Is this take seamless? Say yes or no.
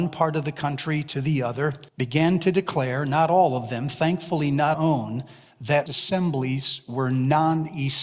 no